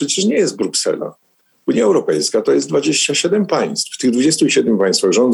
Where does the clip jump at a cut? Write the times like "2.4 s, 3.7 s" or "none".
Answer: none